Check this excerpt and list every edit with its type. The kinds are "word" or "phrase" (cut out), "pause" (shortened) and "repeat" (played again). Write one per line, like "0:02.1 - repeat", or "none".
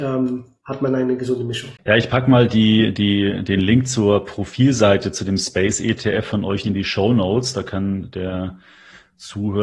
0:01.8 - pause
0:06.6 - phrase